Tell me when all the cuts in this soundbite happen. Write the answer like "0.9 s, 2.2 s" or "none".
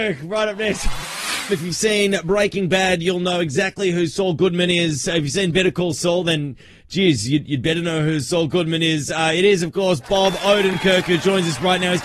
none